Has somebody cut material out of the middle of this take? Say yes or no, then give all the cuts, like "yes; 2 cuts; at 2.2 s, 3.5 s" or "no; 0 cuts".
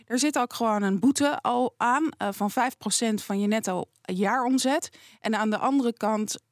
no; 0 cuts